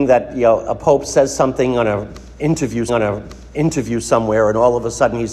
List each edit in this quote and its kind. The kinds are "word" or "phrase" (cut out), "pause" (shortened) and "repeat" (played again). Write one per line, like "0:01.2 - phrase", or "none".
0:02.9 - repeat

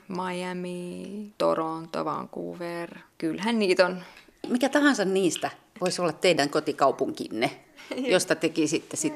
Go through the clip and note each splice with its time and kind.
none

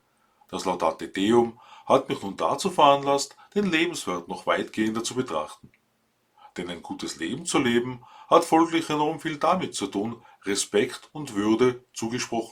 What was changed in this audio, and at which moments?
none

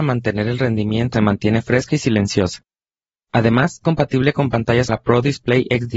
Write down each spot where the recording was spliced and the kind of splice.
0:01.1 - word
0:03.8 - word
0:04.9 - word

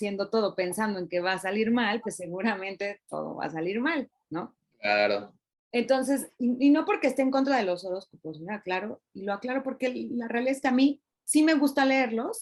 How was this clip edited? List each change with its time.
none

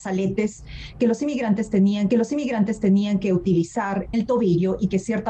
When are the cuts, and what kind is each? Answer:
0:02.1 - repeat
0:04.1 - word

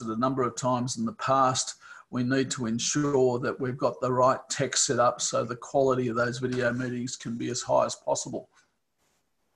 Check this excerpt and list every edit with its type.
none

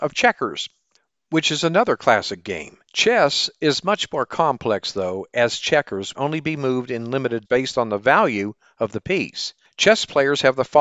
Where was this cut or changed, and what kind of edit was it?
0:02.8 - pause
0:06.1 - phrase
0:07.4 - word

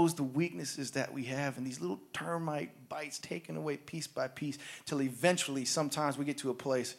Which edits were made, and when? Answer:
0:03.2 - word

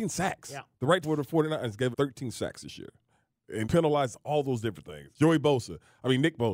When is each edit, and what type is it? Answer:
0:01.0 - word
0:01.9 - word
0:03.6 - word
0:05.1 - pause

